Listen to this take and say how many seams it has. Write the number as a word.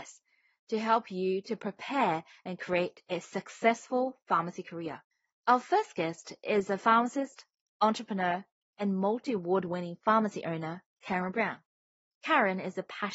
zero